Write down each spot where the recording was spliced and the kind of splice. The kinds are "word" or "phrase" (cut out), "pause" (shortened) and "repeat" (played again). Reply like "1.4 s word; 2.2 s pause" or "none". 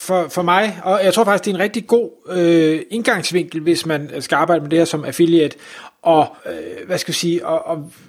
6.4 s pause